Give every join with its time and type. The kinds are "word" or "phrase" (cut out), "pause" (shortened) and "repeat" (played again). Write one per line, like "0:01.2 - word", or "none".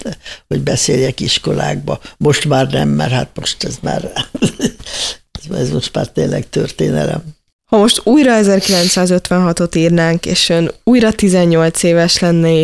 none